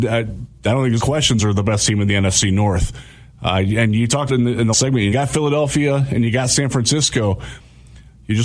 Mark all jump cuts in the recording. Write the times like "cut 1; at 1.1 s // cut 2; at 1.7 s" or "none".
cut 1; at 1.0 s // cut 2; at 1.4 s // cut 3; at 4.3 s // cut 4; at 4.7 s // cut 5; at 5.1 s